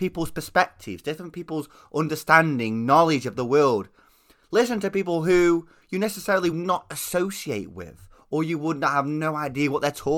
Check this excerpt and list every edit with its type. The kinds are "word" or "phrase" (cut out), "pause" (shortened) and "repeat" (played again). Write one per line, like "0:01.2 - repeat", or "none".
0:06.5 - word

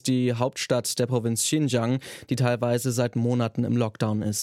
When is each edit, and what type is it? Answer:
none

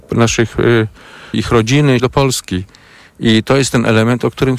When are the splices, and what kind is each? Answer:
0:01.3 - word
0:02.0 - word

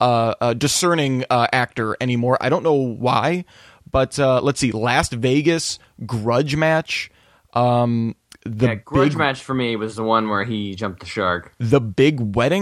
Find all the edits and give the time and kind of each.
none

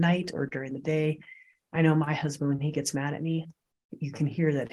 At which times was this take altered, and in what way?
none

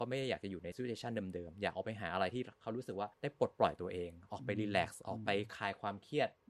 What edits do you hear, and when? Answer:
0:03.1 - pause

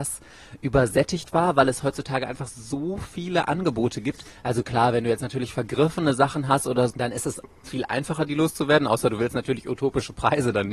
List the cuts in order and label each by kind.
0:06.9 - word

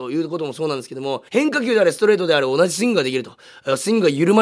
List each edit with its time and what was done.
0:01.3 - pause

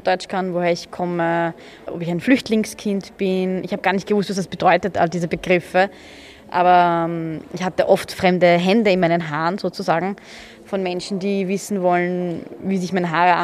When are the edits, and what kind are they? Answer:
none

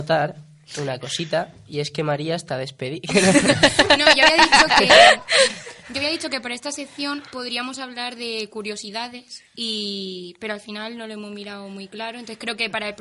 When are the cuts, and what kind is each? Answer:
0:09.5 - pause

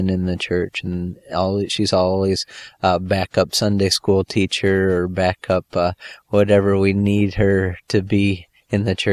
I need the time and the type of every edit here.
none

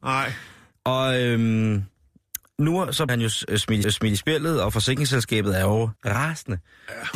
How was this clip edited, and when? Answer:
0:03.1 - word
0:03.8 - repeat
0:06.0 - pause

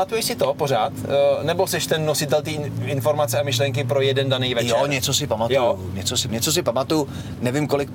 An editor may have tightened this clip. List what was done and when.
0:06.3 - word

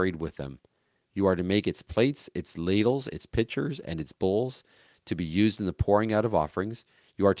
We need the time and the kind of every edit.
none

